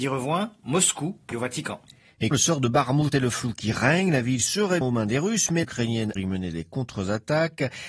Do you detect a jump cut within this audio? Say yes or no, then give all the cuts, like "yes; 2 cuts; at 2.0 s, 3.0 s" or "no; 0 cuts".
yes; 6 cuts; at 1.3 s, 2.3 s, 3.1 s, 4.8 s, 5.6 s, 6.2 s